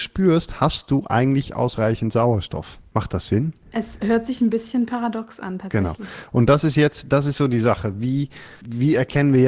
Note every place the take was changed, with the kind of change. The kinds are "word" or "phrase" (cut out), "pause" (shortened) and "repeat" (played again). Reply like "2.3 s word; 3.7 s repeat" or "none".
none